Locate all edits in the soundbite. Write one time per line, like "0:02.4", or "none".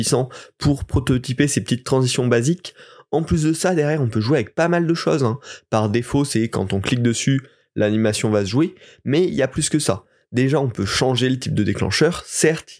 none